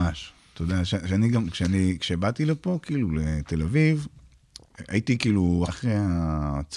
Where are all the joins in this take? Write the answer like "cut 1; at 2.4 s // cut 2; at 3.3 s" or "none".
cut 1; at 5.7 s

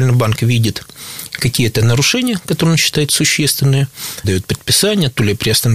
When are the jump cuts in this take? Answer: cut 1; at 4.2 s

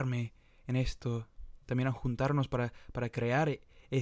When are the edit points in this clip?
cut 1; at 1.6 s

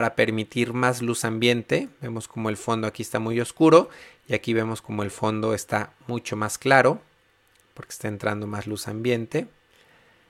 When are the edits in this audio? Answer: none

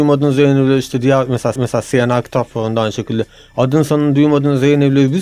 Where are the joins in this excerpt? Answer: cut 1; at 1.6 s

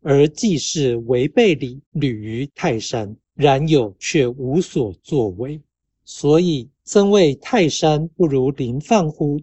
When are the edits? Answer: cut 1; at 1.8 s // cut 2; at 3.3 s // cut 3; at 5.8 s // cut 4; at 6.8 s

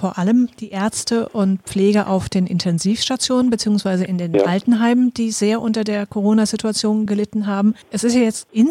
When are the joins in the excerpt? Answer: none

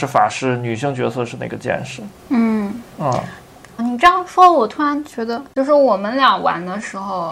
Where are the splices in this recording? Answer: cut 1; at 2.2 s // cut 2; at 3.8 s

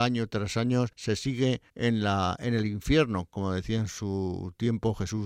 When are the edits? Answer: cut 1; at 0.9 s // cut 2; at 1.7 s

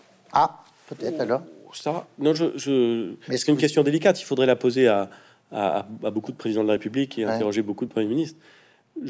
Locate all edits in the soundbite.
none

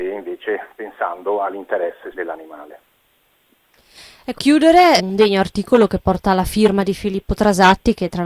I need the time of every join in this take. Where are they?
cut 1; at 2.1 s // cut 2; at 4.3 s // cut 3; at 5.0 s

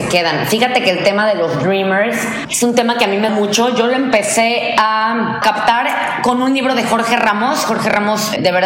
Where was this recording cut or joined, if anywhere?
cut 1; at 3.3 s

